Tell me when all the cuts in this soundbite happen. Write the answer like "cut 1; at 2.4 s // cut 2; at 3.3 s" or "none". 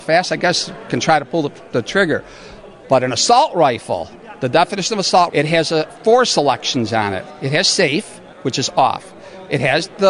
cut 1; at 5.3 s